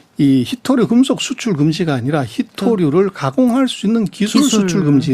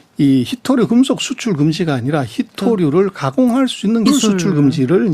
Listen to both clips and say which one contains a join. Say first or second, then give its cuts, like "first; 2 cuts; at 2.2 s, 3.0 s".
second; 1 cut; at 4.1 s